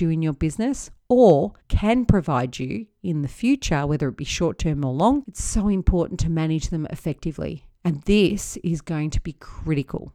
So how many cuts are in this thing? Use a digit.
2